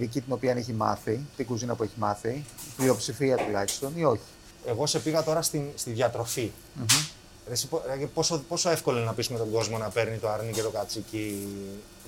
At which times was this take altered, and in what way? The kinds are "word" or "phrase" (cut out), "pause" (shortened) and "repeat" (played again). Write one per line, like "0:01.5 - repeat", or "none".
none